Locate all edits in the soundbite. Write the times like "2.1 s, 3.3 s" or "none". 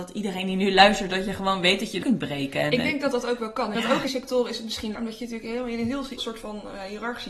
2.0 s, 3.7 s, 4.1 s, 4.9 s, 6.2 s